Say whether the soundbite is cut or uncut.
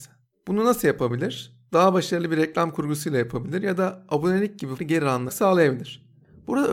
cut